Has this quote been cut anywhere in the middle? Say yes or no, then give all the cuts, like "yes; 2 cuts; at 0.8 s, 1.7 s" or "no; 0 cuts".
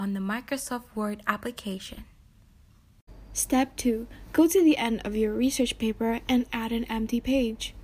no; 0 cuts